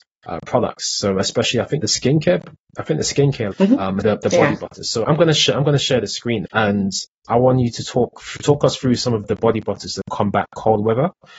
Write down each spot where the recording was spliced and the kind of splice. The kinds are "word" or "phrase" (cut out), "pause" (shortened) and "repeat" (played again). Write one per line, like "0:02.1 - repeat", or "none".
0:01.8 - word
0:03.5 - word
0:04.0 - word
0:05.0 - word
0:06.5 - word
0:09.2 - word